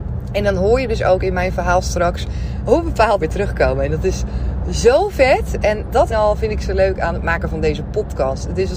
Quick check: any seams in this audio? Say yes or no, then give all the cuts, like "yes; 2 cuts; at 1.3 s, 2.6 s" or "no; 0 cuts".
yes; 2 cuts; at 3.2 s, 6.1 s